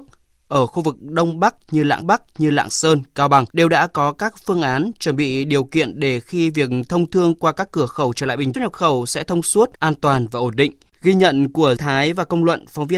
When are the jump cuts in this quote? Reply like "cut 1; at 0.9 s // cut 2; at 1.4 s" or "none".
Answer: cut 1; at 2.0 s // cut 2; at 3.5 s // cut 3; at 8.5 s // cut 4; at 9.7 s // cut 5; at 11.8 s